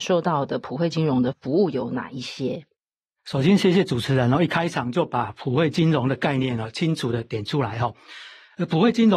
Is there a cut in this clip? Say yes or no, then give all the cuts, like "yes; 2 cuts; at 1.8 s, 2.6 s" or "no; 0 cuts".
no; 0 cuts